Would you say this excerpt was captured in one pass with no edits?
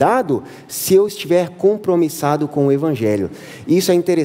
yes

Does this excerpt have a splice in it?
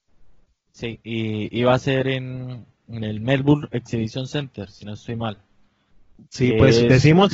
no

